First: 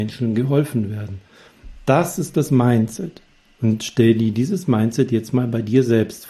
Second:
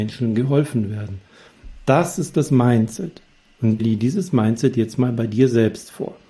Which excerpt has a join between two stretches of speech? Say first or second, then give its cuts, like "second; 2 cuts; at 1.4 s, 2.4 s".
second; 1 cut; at 3.8 s